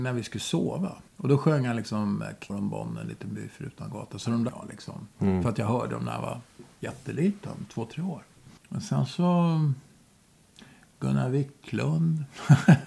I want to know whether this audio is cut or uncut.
cut